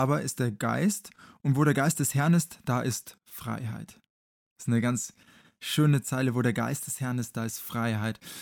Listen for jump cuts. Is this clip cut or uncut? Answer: uncut